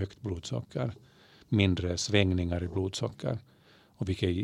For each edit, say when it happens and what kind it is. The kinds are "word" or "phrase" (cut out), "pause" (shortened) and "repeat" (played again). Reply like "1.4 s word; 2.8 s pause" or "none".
none

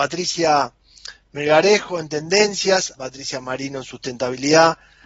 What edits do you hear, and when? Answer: 2.9 s word

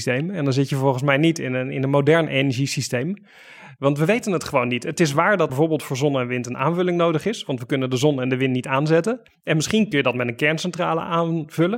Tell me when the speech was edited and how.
5.5 s word; 9.3 s pause

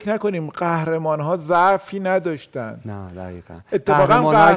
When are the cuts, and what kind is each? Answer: none

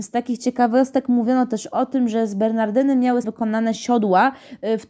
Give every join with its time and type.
3.2 s word

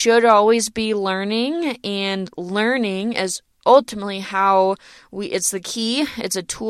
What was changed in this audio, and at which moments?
none

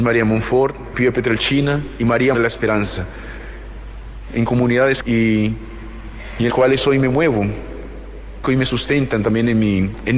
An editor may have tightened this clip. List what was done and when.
0.9 s word; 2.3 s word; 4.5 s word; 5.0 s word; 6.5 s word; 8.4 s word

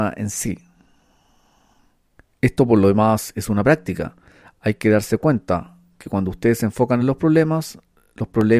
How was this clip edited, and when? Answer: none

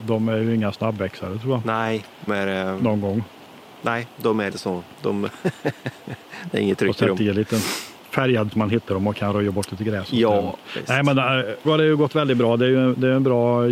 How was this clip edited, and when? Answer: 2.3 s word; 4.5 s word; 8.5 s word; 11.6 s word

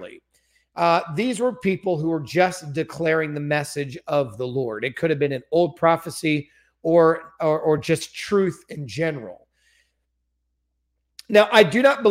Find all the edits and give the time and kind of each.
none

